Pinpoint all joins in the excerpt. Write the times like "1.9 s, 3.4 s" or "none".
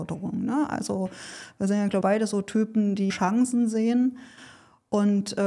2.0 s, 3.1 s